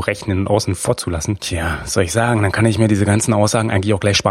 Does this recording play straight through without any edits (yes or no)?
yes